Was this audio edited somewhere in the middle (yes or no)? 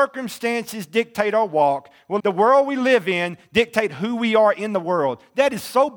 yes